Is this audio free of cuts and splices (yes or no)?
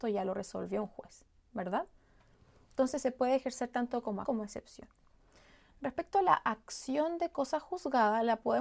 no